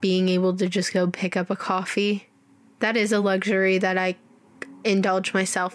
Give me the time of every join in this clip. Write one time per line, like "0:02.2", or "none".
none